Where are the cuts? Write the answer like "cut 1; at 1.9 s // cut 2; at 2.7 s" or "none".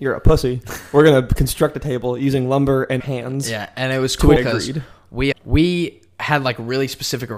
cut 1; at 3.0 s // cut 2; at 4.4 s // cut 3; at 5.3 s